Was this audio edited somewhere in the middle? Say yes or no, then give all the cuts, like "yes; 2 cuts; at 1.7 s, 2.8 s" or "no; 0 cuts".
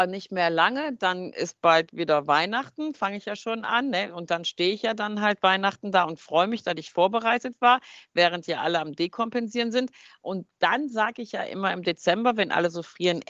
no; 0 cuts